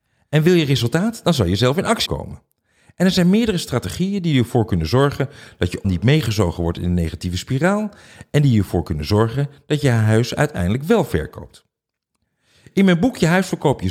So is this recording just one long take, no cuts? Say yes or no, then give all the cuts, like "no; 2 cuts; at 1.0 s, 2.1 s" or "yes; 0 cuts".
no; 2 cuts; at 2.1 s, 5.8 s